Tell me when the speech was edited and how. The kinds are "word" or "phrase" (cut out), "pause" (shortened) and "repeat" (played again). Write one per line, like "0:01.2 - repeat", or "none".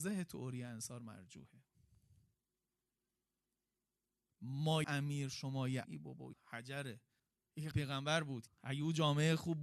0:04.8 - word
0:05.8 - word
0:06.3 - phrase
0:07.2 - pause
0:07.7 - word
0:08.5 - word